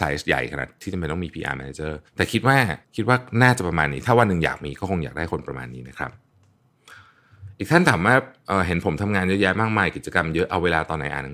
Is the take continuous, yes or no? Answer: no